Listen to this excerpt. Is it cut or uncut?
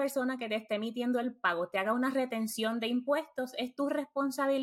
uncut